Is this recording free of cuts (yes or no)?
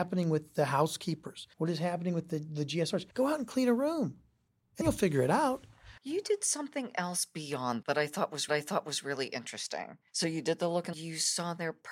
no